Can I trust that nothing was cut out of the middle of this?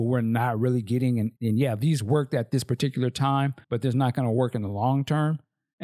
no; 2 cuts; at 1.4 s, 3.6 s

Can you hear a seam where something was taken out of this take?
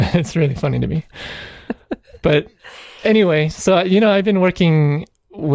no; 0 cuts

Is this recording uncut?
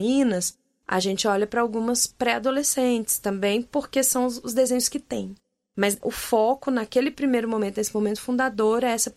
yes; 0 cuts

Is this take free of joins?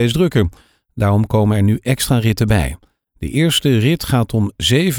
yes; 0 cuts

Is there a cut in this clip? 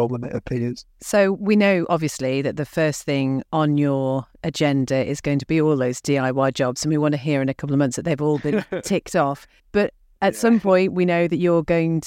yes; 1 cut; at 9.6 s

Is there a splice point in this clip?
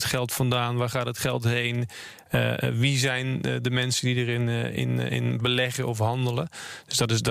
no; 0 cuts

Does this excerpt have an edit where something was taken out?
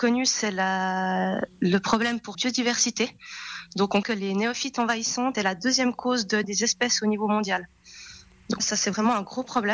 yes; 5 cuts; at 2.3 s, 4.0 s, 5.3 s, 6.4 s, 8.6 s

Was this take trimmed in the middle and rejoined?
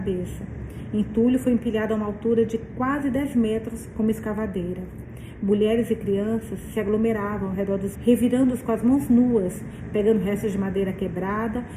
yes; 1 cut; at 7.9 s

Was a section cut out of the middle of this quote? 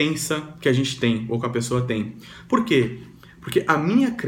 no; 0 cuts

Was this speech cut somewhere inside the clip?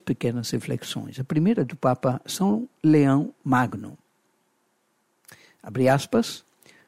no; 0 cuts

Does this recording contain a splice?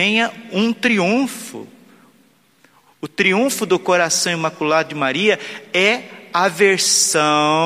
no; 0 cuts

